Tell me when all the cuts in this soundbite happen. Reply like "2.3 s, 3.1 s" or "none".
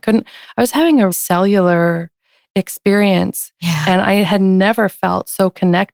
1.1 s